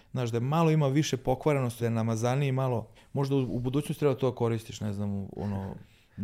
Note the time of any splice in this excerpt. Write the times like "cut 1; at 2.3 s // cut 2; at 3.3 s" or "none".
cut 1; at 1.8 s // cut 2; at 2.9 s